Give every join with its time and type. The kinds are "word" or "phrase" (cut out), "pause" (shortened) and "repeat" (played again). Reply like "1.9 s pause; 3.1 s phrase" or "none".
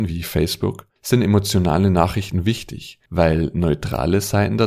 1.0 s pause; 3.1 s pause